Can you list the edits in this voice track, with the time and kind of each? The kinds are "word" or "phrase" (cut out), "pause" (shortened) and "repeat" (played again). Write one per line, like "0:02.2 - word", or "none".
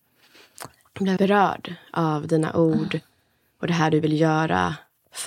0:01.2 - word